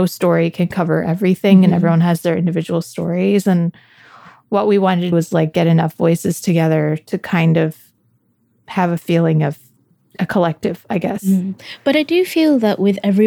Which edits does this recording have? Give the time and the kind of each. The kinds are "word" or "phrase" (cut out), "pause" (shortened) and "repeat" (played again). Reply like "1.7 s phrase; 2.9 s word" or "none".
5.1 s word